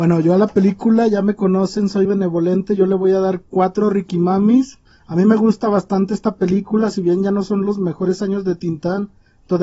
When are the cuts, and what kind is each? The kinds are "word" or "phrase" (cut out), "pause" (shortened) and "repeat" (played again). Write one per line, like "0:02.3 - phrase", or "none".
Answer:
0:02.0 - word